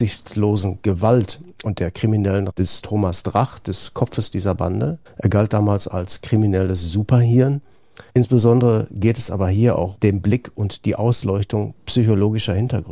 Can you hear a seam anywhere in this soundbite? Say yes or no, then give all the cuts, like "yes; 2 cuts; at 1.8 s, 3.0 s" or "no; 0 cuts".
yes; 4 cuts; at 2.5 s, 5.1 s, 8.1 s, 9.9 s